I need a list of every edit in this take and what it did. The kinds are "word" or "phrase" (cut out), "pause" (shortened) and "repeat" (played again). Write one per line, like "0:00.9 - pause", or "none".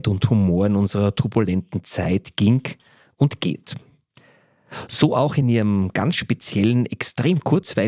none